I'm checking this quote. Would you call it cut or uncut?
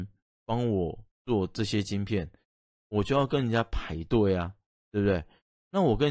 uncut